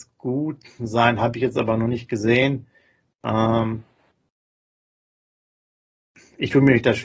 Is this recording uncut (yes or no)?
yes